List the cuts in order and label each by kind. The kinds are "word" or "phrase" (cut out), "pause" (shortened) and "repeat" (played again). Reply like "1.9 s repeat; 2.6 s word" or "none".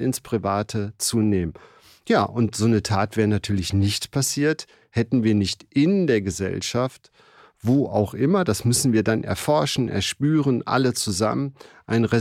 none